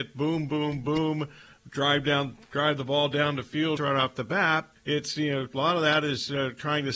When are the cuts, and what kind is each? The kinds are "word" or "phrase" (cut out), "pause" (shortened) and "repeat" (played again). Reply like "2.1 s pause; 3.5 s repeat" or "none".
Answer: 3.8 s phrase; 4.8 s pause